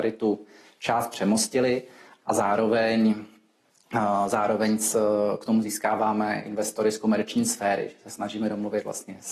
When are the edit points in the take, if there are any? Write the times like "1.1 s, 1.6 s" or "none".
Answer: none

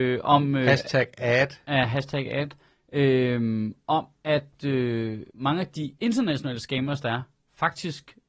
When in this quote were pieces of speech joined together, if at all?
5.3 s

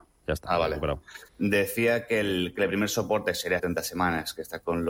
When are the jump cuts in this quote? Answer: 1.3 s, 3.6 s

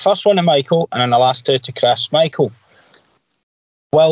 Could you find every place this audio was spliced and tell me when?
none

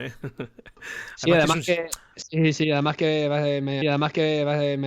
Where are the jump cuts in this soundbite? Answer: 3.8 s

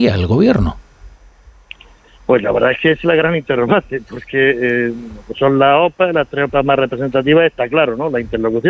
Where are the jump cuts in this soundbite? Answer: none

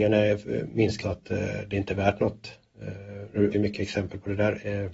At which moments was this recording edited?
1.0 s, 3.5 s

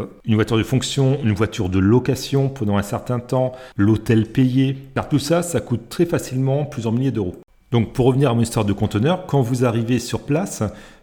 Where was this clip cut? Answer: none

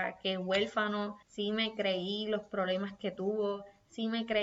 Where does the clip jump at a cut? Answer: 1.2 s

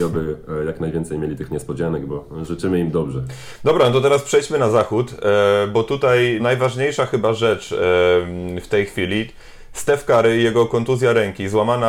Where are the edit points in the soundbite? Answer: 6.4 s

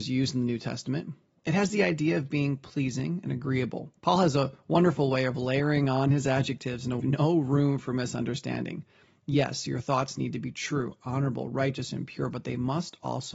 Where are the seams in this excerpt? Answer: 4.0 s, 7.0 s

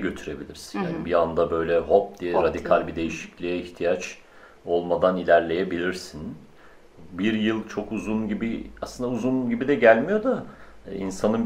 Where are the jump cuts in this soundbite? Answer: none

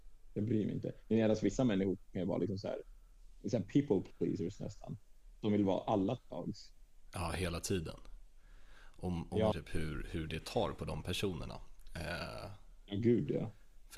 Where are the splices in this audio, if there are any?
6.3 s, 9.5 s

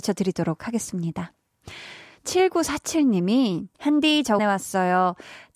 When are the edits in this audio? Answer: 3.7 s, 4.4 s

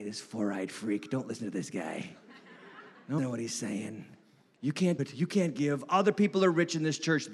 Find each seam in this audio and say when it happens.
3.2 s, 5.0 s

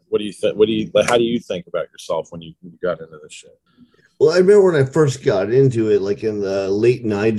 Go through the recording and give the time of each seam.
none

